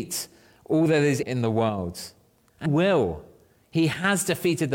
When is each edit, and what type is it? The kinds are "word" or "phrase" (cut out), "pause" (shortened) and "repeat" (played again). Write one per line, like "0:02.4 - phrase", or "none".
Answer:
0:01.2 - word
0:02.7 - word